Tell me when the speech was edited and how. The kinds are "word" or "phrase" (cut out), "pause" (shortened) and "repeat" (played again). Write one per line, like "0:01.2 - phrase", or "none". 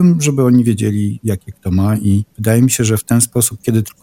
0:02.3 - pause